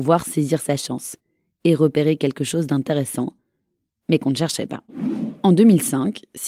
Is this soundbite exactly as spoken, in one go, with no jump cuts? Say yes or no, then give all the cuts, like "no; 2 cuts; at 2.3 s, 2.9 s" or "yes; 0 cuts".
yes; 0 cuts